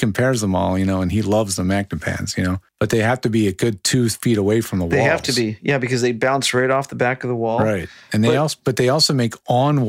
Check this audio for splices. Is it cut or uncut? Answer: cut